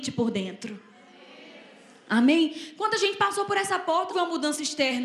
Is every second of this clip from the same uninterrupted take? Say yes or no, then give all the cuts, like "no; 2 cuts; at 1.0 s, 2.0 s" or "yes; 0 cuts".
no; 1 cut; at 4.1 s